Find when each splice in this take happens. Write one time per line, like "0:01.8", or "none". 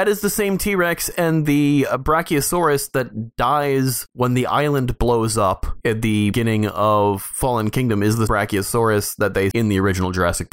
0:06.3
0:08.3
0:09.5